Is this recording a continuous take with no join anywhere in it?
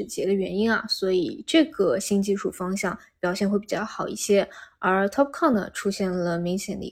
yes; 0 cuts

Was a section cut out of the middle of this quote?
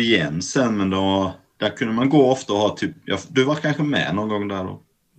no; 0 cuts

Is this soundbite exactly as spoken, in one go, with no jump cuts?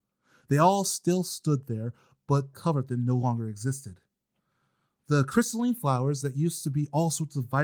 no; 1 cut; at 2.5 s

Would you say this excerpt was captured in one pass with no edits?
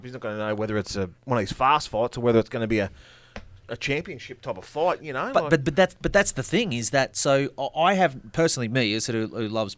no; 2 cuts; at 1.2 s, 3.6 s

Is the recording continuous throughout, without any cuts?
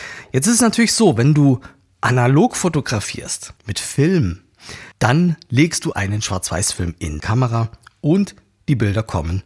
no; 4 cuts; at 3.6 s, 4.9 s, 5.9 s, 7.2 s

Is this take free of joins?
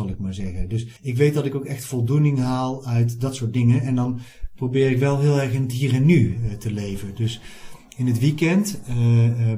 no; 1 cut; at 1.0 s

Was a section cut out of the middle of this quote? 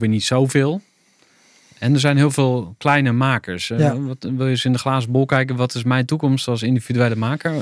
no; 0 cuts

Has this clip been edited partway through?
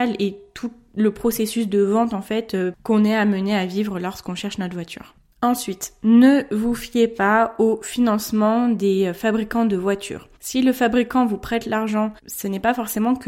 yes; 2 cuts; at 10.4 s, 12.2 s

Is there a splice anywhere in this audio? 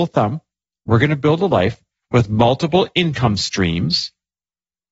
no; 0 cuts

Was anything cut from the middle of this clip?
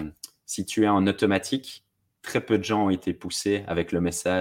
no; 0 cuts

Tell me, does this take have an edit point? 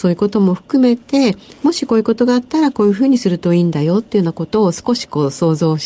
no; 0 cuts

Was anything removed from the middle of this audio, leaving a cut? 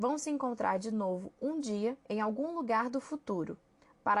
yes; 1 cut; at 2.0 s

